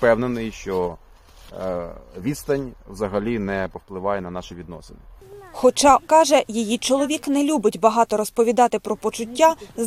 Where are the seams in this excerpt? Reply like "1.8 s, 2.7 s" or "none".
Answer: 6.0 s